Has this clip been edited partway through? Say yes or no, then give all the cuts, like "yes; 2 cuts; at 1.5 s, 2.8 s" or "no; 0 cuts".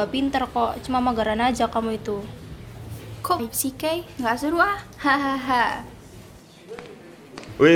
yes; 1 cut; at 3.4 s